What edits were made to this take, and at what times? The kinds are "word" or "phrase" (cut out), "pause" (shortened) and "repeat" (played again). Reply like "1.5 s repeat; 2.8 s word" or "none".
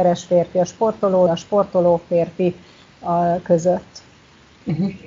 1.3 s word